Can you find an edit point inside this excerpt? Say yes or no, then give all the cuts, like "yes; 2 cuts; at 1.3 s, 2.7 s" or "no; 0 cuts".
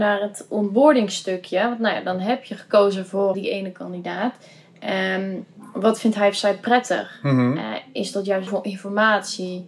yes; 2 cuts; at 3.3 s, 8.5 s